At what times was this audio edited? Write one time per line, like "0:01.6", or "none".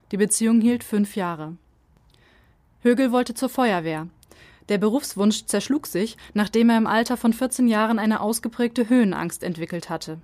none